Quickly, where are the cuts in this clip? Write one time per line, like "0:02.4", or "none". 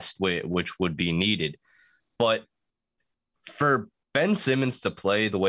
none